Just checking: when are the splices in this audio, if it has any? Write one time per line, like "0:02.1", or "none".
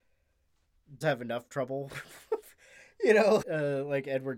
0:01.0
0:03.4